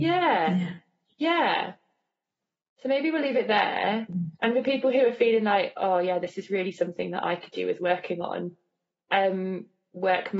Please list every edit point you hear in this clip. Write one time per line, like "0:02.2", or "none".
0:04.3